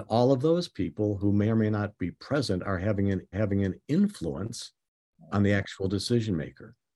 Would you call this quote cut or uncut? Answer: cut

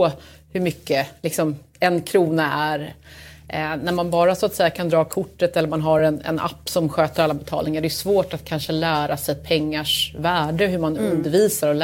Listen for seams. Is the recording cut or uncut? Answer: uncut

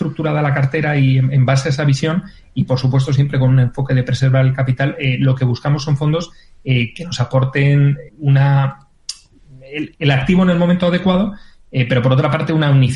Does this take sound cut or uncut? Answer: cut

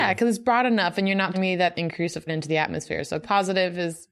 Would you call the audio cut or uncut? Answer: cut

